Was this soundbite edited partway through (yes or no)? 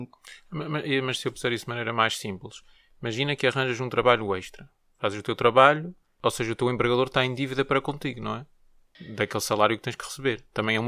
no